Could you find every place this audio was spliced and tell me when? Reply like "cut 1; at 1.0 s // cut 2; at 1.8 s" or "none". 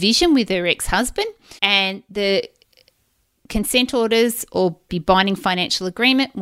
cut 1; at 1.6 s // cut 2; at 4.9 s